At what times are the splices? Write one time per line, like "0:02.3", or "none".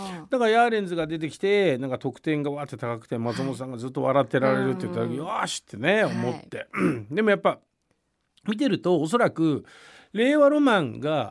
none